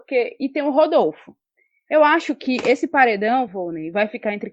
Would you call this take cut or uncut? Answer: uncut